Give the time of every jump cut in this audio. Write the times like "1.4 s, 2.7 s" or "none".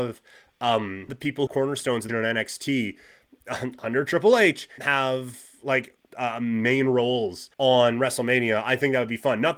1.1 s, 1.5 s, 2.1 s, 4.8 s, 6.1 s, 7.5 s